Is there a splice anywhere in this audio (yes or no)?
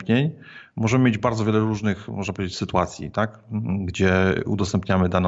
no